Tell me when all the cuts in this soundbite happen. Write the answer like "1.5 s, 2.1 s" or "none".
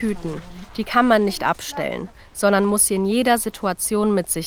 none